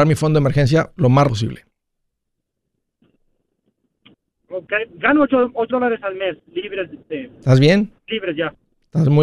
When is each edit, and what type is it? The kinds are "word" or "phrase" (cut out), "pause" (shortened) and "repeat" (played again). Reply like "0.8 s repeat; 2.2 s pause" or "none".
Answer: 1.3 s word; 5.7 s word; 8.0 s pause